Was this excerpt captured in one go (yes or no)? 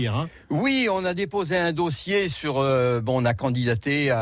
yes